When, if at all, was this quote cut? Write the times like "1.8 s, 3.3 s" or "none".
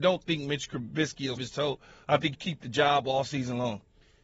1.4 s, 2.3 s